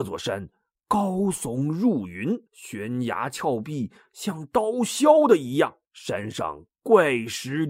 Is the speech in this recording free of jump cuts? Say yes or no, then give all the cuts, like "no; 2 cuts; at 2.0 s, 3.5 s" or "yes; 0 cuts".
no; 2 cuts; at 2.5 s, 5.8 s